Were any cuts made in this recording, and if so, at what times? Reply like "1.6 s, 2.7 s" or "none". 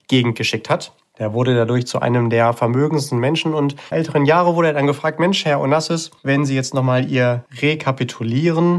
3.9 s, 6.2 s, 7.5 s